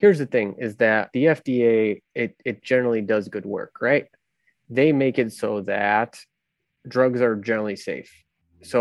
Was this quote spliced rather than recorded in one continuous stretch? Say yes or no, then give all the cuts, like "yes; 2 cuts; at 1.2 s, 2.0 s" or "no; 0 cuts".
yes; 1 cut; at 1.1 s